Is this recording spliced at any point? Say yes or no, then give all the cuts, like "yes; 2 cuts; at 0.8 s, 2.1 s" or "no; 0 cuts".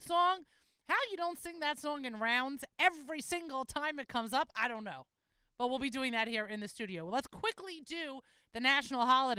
no; 0 cuts